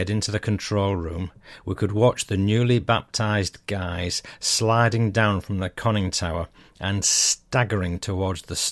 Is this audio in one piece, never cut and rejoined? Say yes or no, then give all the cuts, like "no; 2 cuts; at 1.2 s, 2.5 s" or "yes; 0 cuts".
yes; 0 cuts